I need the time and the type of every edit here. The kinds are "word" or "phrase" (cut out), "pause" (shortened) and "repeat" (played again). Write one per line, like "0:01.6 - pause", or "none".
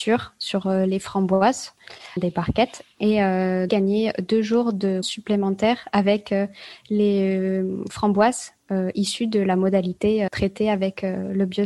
0:02.2 - word
0:03.7 - phrase
0:05.0 - word
0:10.3 - word